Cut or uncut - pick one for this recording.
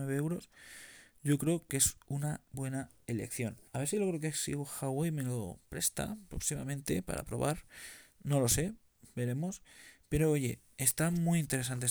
cut